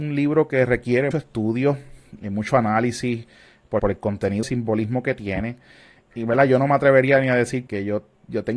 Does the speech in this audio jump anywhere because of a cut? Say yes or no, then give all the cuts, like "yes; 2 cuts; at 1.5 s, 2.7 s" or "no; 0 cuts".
yes; 5 cuts; at 1.1 s, 3.8 s, 4.4 s, 6.1 s, 7.7 s